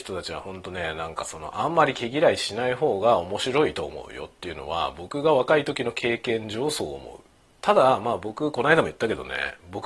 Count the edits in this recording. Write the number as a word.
one